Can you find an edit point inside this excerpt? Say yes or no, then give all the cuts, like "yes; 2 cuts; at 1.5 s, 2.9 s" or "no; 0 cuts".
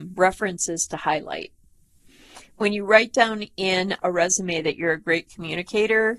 no; 0 cuts